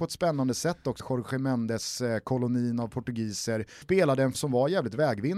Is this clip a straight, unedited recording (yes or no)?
no